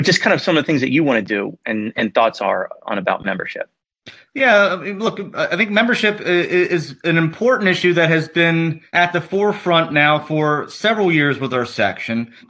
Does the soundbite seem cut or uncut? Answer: uncut